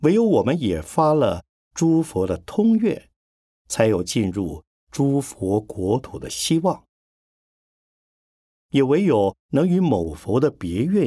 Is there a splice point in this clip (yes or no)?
no